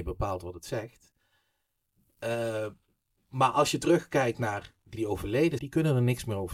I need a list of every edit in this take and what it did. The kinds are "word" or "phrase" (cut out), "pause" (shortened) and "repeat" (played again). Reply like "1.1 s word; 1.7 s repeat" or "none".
5.0 s word; 5.6 s word